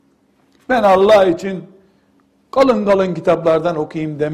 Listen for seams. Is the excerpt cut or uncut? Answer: uncut